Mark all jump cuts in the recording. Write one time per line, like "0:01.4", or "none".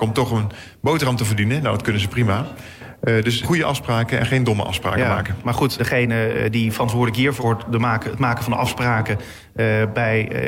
0:03.4
0:05.8
0:07.4